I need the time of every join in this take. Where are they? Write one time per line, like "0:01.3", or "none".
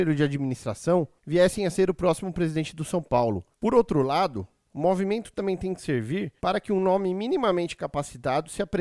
0:01.2
0:03.5
0:06.4